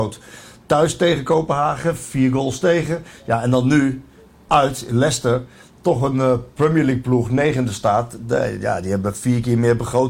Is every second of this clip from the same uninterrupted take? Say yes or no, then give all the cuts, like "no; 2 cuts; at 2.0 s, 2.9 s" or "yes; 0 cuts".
yes; 0 cuts